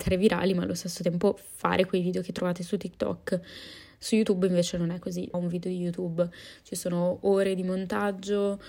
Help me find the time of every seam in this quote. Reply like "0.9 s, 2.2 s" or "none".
5.3 s